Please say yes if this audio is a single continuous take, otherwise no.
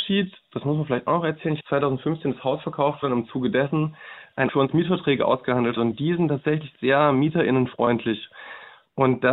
no